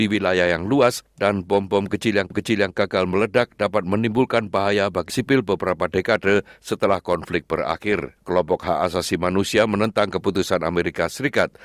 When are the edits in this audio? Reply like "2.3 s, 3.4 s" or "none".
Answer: 2.3 s, 5.1 s, 8.2 s